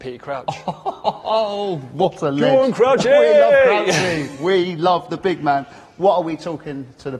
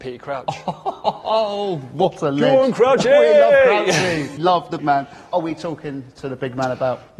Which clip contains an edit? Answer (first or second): second